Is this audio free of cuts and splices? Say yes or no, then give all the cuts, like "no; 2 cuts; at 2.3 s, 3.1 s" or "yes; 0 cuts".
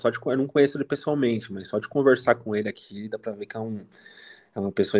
yes; 0 cuts